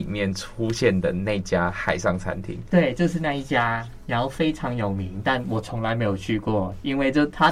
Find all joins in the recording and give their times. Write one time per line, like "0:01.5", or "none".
none